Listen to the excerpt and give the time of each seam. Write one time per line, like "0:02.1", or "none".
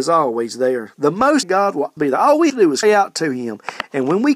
0:01.4
0:02.0
0:02.5
0:02.8